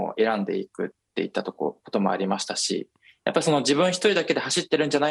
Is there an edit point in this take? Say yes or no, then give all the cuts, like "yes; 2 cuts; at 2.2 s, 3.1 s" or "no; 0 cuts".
no; 0 cuts